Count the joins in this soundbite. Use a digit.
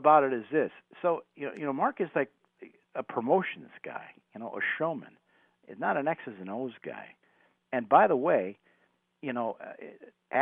0